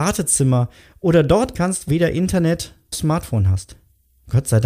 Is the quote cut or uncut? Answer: cut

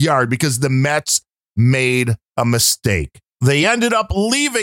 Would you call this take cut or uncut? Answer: uncut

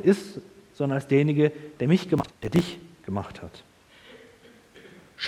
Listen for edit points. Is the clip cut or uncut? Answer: cut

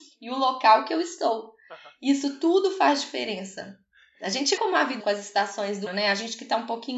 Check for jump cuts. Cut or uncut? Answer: cut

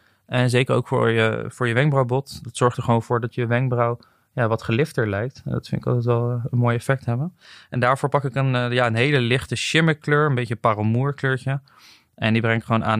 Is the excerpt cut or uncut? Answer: uncut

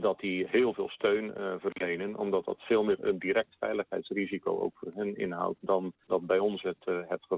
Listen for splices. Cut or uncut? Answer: uncut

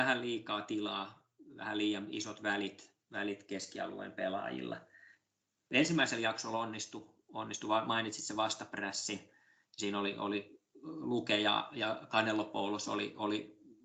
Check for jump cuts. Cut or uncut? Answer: uncut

